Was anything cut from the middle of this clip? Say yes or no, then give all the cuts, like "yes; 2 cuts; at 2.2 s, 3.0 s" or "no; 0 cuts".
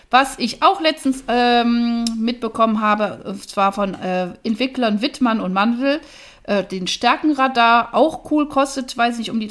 no; 0 cuts